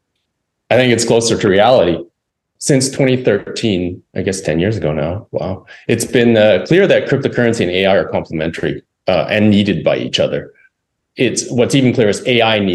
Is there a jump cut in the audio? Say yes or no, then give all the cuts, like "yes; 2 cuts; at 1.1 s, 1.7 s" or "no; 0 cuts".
no; 0 cuts